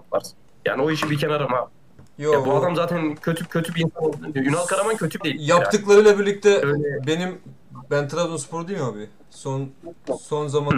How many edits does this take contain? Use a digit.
3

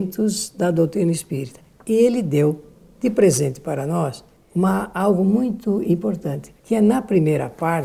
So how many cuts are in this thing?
2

